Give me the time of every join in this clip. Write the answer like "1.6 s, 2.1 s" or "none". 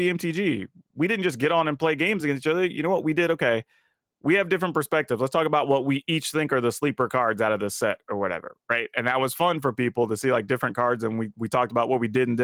none